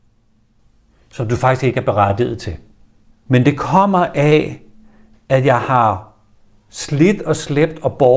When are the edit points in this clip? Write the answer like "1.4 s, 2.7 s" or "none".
none